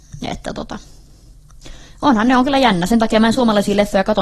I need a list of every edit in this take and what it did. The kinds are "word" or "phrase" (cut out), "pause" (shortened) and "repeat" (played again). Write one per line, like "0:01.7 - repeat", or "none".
none